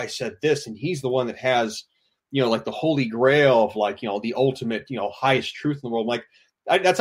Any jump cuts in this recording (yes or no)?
no